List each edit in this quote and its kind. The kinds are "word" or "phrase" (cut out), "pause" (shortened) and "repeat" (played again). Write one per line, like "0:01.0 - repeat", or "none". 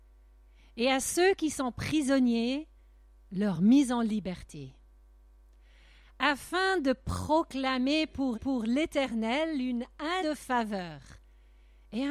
0:08.3 - repeat
0:10.2 - word